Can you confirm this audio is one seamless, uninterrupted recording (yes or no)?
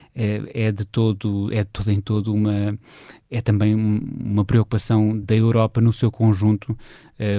no